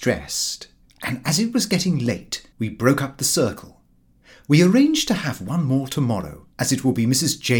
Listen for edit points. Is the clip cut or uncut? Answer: cut